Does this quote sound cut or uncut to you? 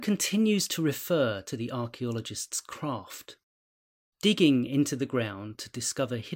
uncut